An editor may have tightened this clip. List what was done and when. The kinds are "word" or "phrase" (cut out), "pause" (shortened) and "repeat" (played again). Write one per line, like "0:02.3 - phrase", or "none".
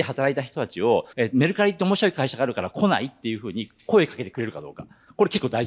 0:01.1 - pause